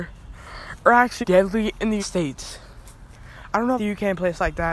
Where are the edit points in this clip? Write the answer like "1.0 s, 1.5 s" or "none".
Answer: 1.2 s, 2.0 s, 3.8 s